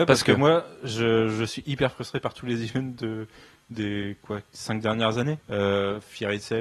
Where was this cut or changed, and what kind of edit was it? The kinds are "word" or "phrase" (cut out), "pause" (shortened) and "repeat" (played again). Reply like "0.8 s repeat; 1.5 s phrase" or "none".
5.4 s pause